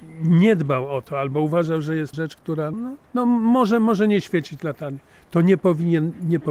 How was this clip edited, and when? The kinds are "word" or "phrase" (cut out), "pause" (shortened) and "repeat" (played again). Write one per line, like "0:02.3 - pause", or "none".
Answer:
0:02.1 - word
0:02.7 - word
0:03.0 - pause